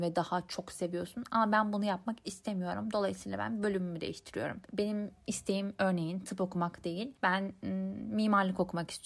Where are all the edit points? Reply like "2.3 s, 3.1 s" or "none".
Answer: 4.6 s, 7.2 s